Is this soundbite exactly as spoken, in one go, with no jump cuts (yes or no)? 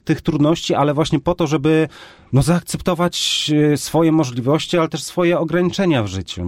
yes